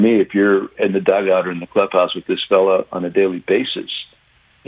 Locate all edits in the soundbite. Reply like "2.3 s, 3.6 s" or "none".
none